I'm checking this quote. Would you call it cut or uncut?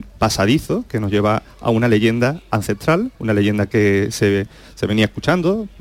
cut